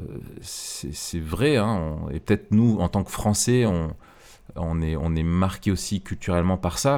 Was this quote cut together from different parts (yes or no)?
no